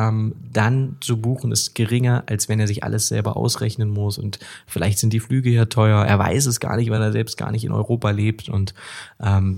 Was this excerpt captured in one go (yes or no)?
yes